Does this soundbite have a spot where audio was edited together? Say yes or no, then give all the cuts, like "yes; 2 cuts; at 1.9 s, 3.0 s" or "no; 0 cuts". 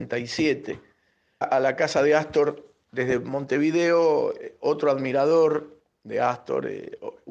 yes; 1 cut; at 1.4 s